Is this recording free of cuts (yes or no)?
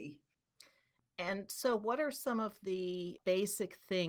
yes